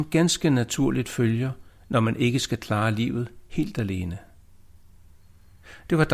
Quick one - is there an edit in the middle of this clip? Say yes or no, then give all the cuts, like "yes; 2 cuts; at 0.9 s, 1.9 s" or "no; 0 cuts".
no; 0 cuts